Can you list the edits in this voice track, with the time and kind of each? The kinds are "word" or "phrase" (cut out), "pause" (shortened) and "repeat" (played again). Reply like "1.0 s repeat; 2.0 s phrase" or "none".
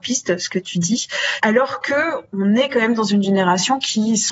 none